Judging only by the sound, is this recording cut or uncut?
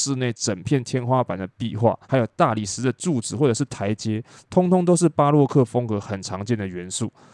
cut